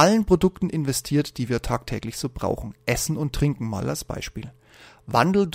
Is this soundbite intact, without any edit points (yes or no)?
yes